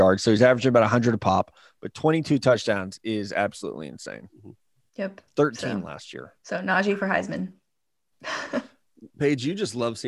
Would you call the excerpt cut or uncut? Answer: cut